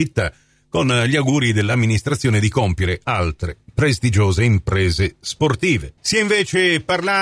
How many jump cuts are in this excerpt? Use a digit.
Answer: 1